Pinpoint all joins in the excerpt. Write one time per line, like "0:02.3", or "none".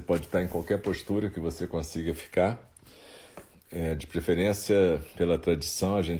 0:03.5
0:05.1